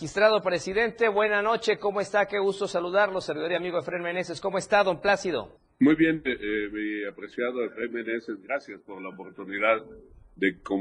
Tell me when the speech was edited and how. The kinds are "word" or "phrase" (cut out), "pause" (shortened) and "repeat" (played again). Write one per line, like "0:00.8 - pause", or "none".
0:05.6 - pause

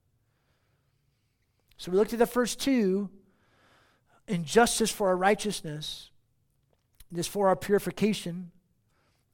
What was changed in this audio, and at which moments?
none

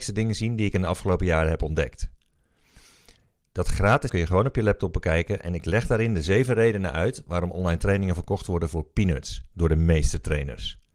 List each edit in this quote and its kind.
0:04.1 - word

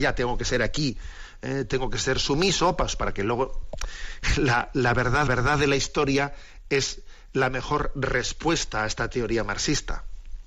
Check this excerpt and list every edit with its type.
0:05.3 - repeat

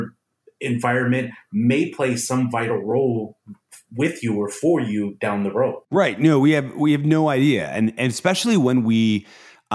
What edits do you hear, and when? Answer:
none

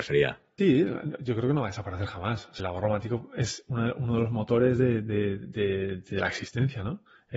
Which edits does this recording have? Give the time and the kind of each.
0:02.6 - phrase

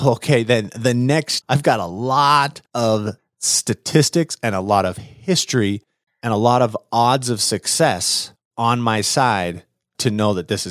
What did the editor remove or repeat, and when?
0:01.4 - word
0:02.7 - pause
0:06.1 - word

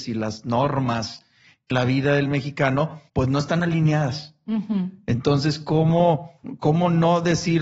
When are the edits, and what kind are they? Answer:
0:01.7 - word
0:03.1 - pause

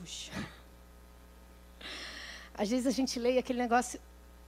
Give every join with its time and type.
none

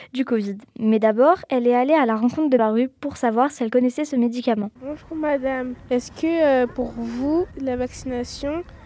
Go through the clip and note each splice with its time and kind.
0:02.6 - phrase

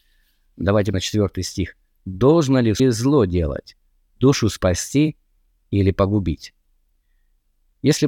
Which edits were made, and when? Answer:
0:00.9 - word
0:02.8 - phrase

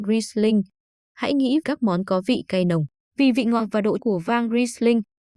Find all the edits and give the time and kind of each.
0:01.6 - word
0:03.0 - pause
0:04.0 - word

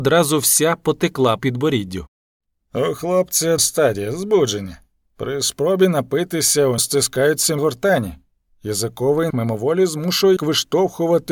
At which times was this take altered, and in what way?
0:01.4 - word
0:03.6 - word
0:06.8 - word
0:07.6 - word
0:09.3 - word
0:10.4 - word

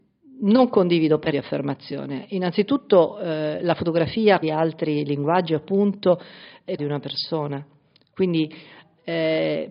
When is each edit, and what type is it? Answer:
0:01.3 - phrase
0:04.4 - phrase
0:06.8 - phrase

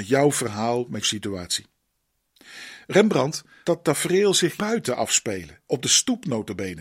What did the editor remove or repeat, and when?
0:01.0 - word
0:03.6 - word
0:04.6 - word
0:05.7 - phrase

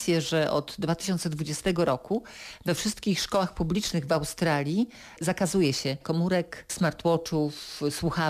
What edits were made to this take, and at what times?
0:06.0 - word

